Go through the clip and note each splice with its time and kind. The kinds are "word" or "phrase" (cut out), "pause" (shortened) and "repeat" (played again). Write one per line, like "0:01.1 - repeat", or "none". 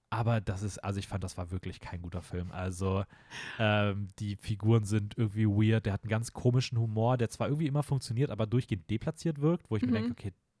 none

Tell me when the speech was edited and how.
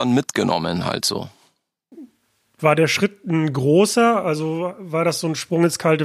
none

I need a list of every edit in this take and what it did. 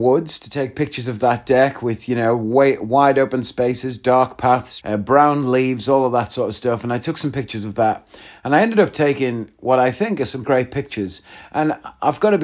0:04.8 - word
0:10.4 - word

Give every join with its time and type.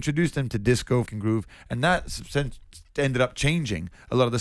0:01.1 - word

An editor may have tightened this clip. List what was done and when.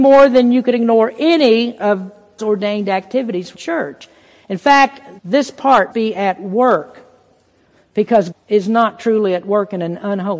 0:01.8 - word
0:02.4 - word
0:03.5 - word
0:05.2 - word
0:05.9 - word
0:08.3 - word

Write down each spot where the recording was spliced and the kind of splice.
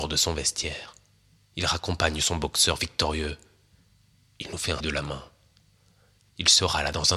0:04.8 - word

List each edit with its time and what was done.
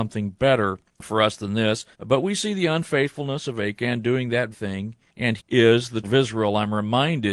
0:01.9 - pause
0:04.5 - word
0:05.4 - word
0:06.0 - word

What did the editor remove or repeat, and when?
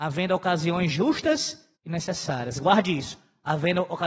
0:01.7 - pause

